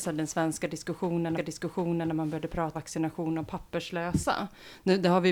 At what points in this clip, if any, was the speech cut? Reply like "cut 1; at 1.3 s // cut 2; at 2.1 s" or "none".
cut 1; at 1.4 s // cut 2; at 2.7 s